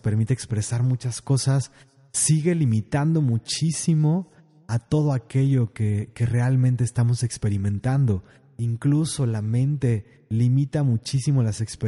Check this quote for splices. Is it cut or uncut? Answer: uncut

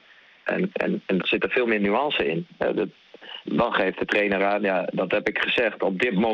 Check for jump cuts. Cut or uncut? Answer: cut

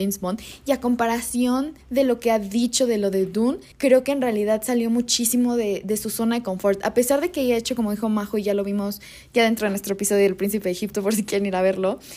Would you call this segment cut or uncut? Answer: cut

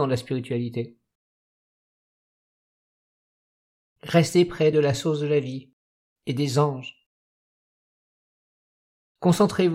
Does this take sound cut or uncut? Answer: uncut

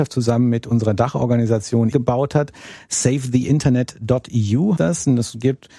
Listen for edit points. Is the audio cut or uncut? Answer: cut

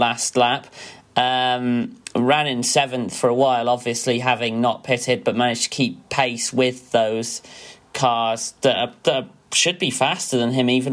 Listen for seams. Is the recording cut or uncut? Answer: uncut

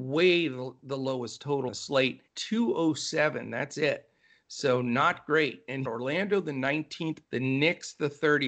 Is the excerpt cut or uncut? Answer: cut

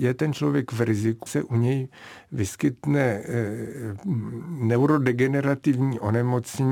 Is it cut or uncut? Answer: cut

